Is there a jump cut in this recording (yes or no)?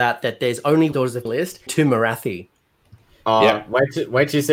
yes